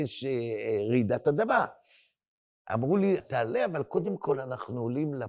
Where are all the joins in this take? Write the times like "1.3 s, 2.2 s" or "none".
3.2 s